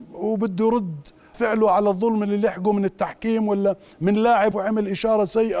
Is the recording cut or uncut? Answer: cut